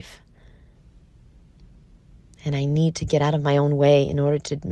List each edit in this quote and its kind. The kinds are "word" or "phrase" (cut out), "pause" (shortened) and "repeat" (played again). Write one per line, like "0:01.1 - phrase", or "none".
none